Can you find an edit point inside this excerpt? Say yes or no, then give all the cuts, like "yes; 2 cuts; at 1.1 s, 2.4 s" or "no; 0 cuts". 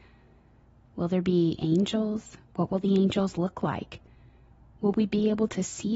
yes; 1 cut; at 2.5 s